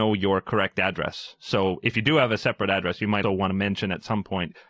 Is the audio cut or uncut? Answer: cut